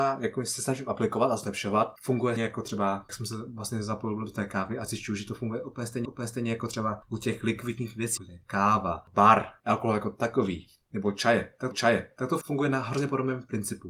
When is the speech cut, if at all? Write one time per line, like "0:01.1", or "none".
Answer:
0:02.4
0:03.1
0:06.1
0:08.2
0:11.7